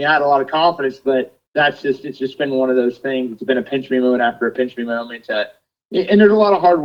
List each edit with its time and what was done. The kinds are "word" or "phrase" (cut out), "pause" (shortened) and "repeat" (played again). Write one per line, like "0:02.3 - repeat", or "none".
0:01.5 - pause